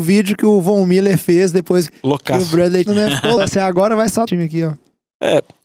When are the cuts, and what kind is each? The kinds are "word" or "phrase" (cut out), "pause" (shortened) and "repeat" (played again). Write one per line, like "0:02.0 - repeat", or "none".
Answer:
0:01.9 - word
0:02.9 - phrase
0:03.4 - word
0:04.3 - phrase